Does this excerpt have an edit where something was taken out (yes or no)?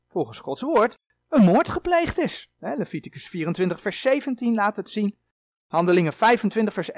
no